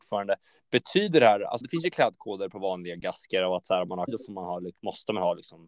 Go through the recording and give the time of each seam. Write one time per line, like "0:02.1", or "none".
0:01.6
0:04.1